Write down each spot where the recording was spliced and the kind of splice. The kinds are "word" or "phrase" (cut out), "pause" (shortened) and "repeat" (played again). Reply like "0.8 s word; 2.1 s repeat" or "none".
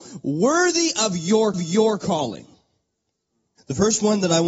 1.5 s repeat